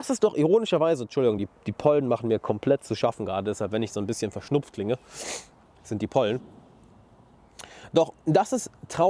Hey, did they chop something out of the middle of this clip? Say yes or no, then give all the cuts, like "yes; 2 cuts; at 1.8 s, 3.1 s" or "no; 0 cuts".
no; 0 cuts